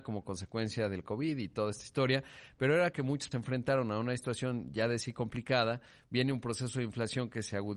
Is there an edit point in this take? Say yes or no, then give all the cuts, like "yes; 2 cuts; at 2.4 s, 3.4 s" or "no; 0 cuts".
yes; 2 cuts; at 2.9 s, 3.3 s